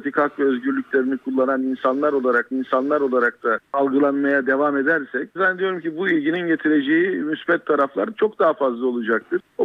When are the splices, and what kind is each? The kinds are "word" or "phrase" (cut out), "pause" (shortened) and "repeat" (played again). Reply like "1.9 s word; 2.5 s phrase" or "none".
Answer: 2.5 s repeat; 5.4 s word